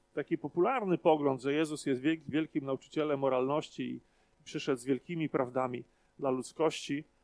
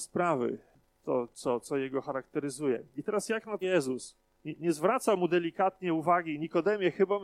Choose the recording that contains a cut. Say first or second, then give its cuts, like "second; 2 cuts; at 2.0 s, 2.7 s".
second; 1 cut; at 3.6 s